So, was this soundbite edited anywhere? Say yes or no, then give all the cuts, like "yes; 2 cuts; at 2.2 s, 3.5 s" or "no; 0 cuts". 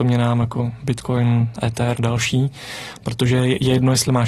yes; 1 cut; at 1.9 s